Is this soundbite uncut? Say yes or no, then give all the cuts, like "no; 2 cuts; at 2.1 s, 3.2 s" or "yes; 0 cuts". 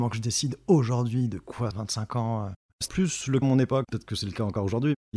no; 3 cuts; at 1.7 s, 2.9 s, 3.4 s